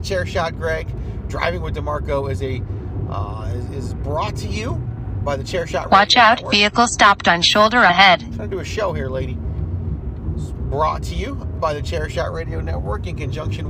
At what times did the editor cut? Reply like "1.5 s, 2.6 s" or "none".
none